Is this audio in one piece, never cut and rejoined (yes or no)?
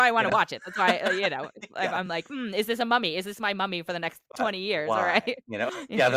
yes